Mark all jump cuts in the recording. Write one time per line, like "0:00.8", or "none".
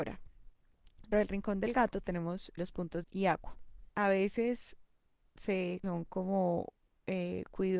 0:01.1
0:02.6
0:03.0
0:03.9
0:05.8